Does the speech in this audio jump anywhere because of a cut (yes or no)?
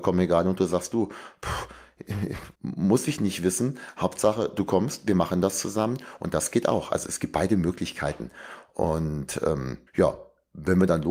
yes